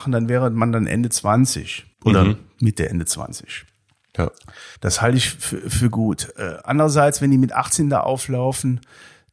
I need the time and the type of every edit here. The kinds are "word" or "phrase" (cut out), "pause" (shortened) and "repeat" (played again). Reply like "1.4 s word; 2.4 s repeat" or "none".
1.9 s pause; 4.8 s pause